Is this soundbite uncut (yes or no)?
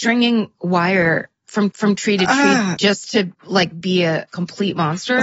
no